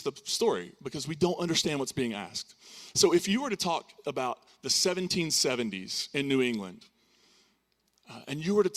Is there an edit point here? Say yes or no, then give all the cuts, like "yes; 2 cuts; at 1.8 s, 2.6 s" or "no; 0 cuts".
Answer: no; 0 cuts